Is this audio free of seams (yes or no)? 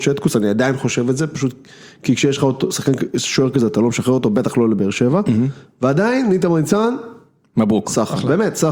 yes